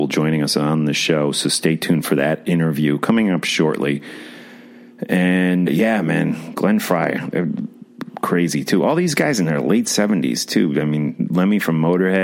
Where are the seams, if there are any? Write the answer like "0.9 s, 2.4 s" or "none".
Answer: 5.7 s